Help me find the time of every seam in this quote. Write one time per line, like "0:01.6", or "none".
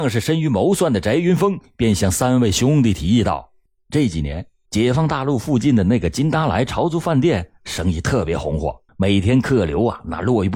0:04.7
0:08.9